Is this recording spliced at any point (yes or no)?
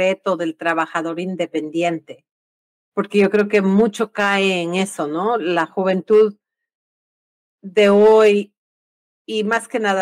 no